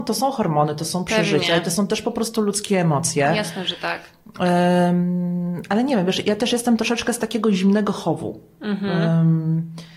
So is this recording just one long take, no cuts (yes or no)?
yes